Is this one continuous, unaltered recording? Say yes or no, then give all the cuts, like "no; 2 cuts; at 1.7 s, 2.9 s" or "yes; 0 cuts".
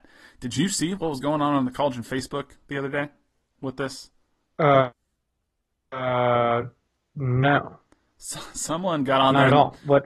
yes; 0 cuts